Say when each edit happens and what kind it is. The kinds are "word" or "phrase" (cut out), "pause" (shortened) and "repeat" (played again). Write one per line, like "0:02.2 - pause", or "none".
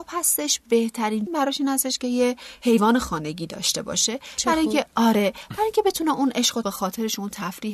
0:01.3 - word
0:06.6 - word